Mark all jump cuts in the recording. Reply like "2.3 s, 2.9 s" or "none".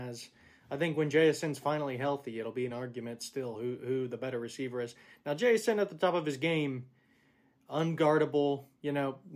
none

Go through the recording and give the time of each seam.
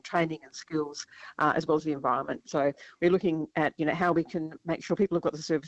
none

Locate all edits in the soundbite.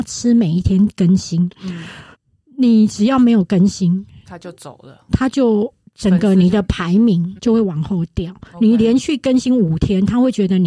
2.1 s, 7.4 s

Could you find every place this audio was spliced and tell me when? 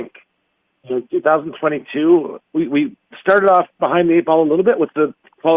2.4 s

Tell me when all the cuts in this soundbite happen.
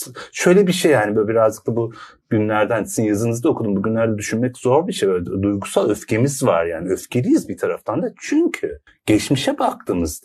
8.9 s

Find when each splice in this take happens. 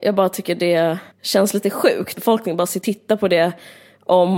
1.1 s, 2.1 s, 2.8 s

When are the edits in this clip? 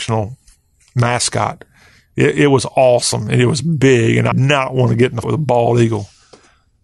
4.3 s, 5.2 s

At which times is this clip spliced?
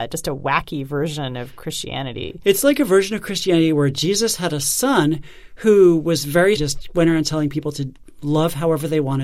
6.6 s

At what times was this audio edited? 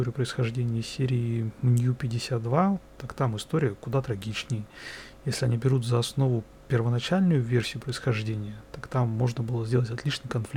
none

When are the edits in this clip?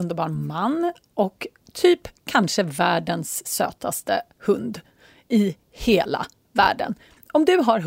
none

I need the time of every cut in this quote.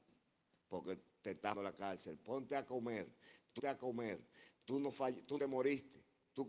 1.5 s, 3.6 s, 5.4 s

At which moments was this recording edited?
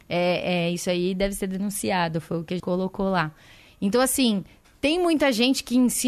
2.6 s

